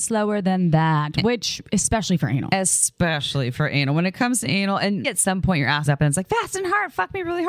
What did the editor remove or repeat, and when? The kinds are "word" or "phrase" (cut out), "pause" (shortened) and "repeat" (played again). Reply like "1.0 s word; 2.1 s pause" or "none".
5.0 s word; 5.9 s word